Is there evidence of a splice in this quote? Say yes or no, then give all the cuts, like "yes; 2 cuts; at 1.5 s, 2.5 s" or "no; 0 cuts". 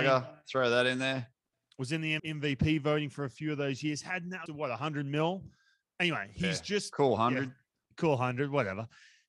yes; 2 cuts; at 2.2 s, 4.5 s